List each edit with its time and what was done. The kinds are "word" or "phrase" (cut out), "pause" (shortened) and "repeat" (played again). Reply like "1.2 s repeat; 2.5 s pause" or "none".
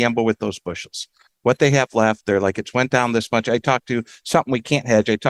none